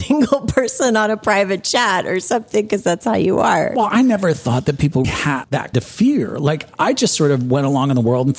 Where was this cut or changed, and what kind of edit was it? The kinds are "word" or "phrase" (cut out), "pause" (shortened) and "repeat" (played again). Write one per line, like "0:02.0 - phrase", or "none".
0:05.0 - word
0:05.7 - word

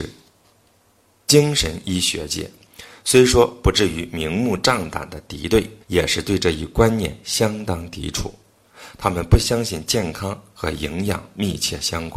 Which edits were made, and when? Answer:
0:05.8 - pause

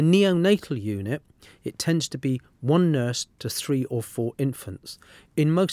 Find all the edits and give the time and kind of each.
none

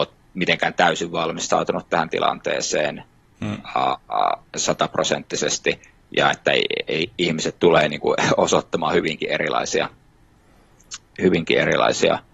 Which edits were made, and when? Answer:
0:04.5 - pause

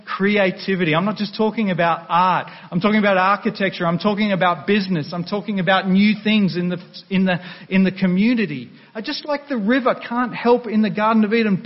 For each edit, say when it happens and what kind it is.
none

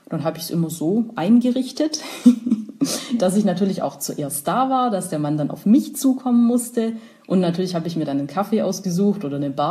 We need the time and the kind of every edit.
none

